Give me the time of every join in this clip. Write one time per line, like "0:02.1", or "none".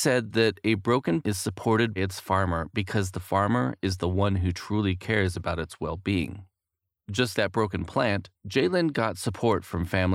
0:01.2
0:02.0
0:07.3
0:08.3

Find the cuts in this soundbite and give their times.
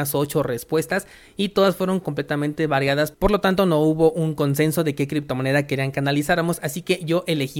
none

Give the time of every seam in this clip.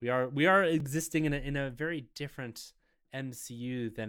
none

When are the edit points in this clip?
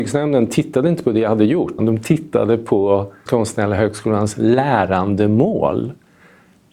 0:01.8
0:03.3

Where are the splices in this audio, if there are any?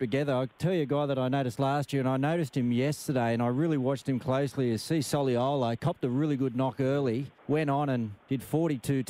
0:07.4
0:08.2

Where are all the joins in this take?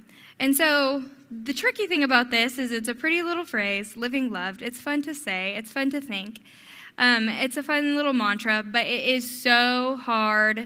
none

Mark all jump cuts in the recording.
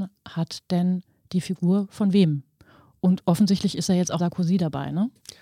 0:04.2

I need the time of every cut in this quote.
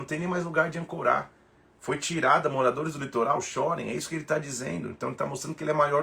none

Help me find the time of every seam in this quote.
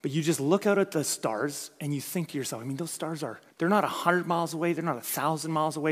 0:03.5

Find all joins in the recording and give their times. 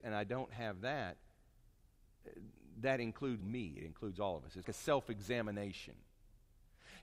0:03.4
0:04.6

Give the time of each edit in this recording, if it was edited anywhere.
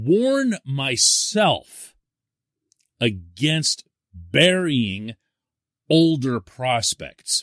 none

